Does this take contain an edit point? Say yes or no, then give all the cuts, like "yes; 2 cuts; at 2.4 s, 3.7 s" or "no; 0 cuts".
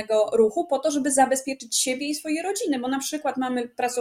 no; 0 cuts